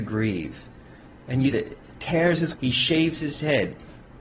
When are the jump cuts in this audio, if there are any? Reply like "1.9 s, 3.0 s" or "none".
1.5 s, 2.0 s, 2.6 s